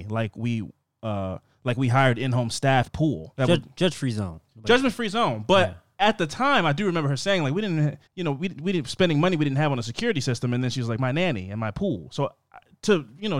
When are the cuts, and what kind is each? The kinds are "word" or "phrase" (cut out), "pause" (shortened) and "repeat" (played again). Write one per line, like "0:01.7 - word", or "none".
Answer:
0:02.9 - word
0:03.3 - word
0:08.1 - pause